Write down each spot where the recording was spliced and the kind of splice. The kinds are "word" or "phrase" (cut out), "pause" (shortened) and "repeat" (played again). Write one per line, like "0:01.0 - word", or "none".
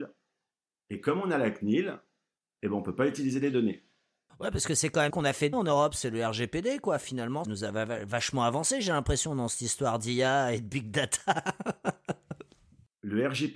0:05.1 - word
0:05.5 - word
0:07.4 - word